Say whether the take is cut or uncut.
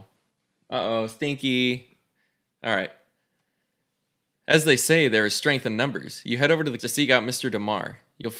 cut